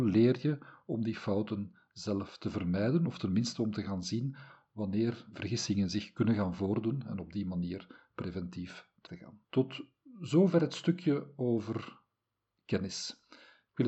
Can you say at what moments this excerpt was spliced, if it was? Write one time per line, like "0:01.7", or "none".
0:05.3
0:09.1
0:09.4